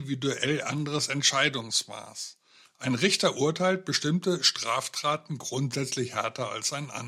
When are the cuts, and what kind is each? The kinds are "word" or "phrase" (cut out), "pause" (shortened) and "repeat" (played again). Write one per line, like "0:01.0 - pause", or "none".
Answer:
none